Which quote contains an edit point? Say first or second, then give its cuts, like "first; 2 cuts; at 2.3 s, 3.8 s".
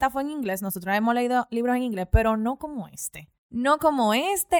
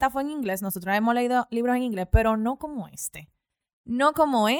first; 1 cut; at 3.4 s